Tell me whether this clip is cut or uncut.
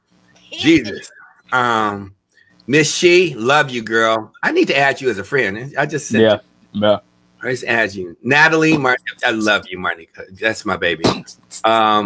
uncut